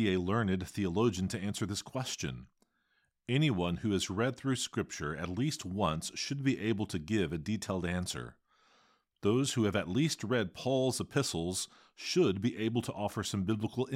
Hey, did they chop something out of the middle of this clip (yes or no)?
no